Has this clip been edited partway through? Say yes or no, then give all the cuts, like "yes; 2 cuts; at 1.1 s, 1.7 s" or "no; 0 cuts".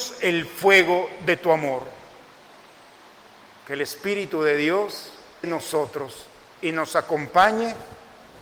yes; 1 cut; at 5.4 s